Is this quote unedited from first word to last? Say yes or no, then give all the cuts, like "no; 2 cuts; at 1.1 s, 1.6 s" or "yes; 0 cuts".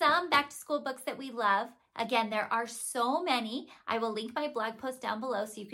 yes; 0 cuts